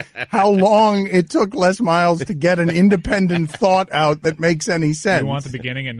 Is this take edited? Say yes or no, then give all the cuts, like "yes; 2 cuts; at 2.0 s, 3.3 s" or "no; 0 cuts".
no; 0 cuts